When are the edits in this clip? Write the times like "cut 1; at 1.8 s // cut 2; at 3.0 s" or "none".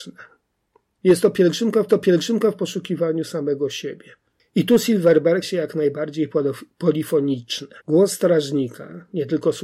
cut 1; at 1.9 s // cut 2; at 4.3 s // cut 3; at 5.4 s // cut 4; at 7.8 s